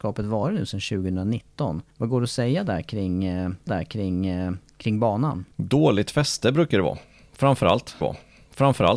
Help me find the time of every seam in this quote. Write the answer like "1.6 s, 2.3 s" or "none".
1.9 s, 3.7 s, 5.5 s, 8.0 s